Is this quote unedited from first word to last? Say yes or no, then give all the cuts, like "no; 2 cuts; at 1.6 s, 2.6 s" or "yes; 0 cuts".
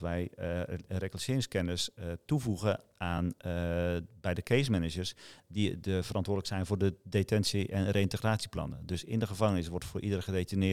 yes; 0 cuts